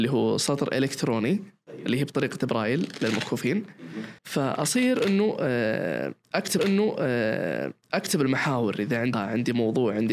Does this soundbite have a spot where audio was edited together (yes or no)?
yes